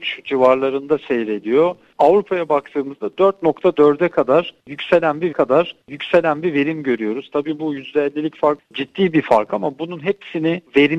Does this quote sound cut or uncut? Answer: cut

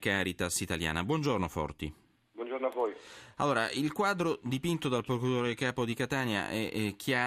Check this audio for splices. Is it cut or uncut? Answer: uncut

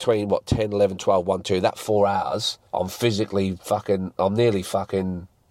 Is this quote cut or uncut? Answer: cut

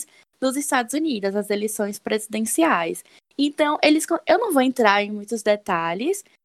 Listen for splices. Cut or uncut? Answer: uncut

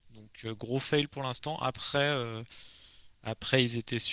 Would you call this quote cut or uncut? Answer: uncut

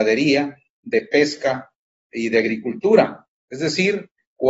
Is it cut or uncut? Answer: uncut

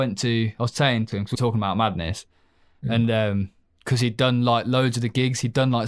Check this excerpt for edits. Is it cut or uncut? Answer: cut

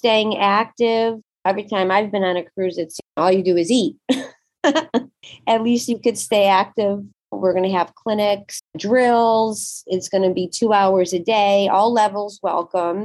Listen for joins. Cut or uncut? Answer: uncut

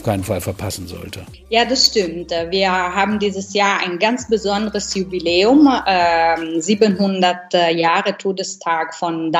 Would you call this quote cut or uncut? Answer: uncut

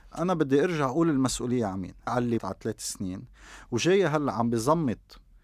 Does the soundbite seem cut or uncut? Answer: cut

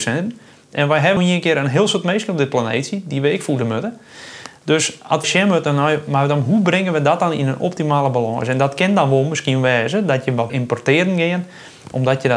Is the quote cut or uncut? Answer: cut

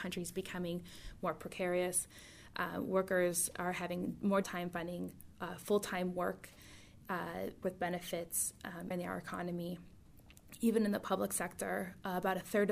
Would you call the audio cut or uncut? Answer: cut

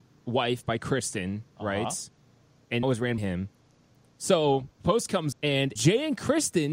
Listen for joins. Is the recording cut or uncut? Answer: cut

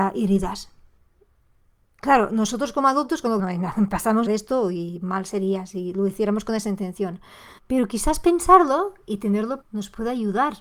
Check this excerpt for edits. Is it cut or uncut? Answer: cut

